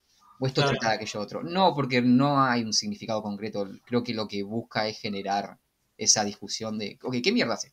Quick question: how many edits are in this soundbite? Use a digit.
0